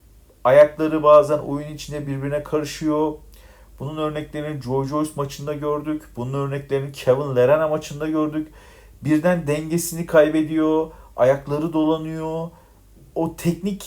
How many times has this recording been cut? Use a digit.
0